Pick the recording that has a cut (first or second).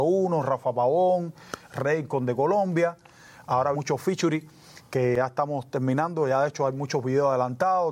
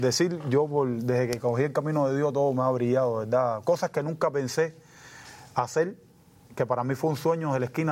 first